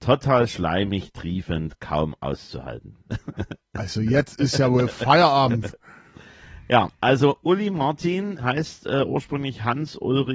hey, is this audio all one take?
no; 1 cut; at 8.4 s

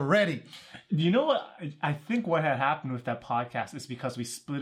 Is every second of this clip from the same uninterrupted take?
yes; 0 cuts

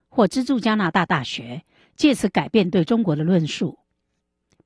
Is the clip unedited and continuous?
yes; 0 cuts

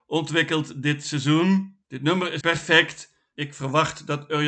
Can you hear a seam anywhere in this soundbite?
yes; 3 cuts; at 1.8 s, 2.4 s, 3.4 s

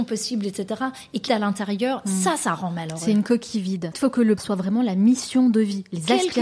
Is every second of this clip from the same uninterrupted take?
no; 3 cuts; at 1.3 s, 3.9 s, 4.4 s

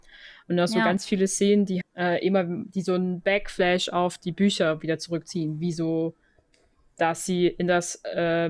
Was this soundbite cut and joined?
yes; 1 cut; at 1.8 s

